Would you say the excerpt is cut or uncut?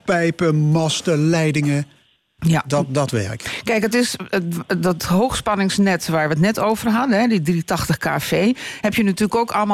uncut